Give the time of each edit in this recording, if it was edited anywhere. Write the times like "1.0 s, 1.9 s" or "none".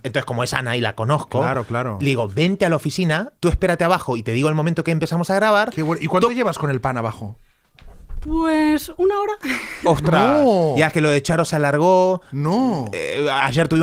3.4 s